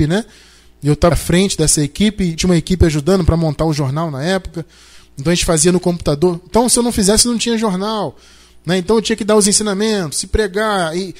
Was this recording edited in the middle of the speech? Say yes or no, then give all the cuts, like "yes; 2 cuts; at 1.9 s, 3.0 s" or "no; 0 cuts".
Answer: yes; 2 cuts; at 1.1 s, 2.4 s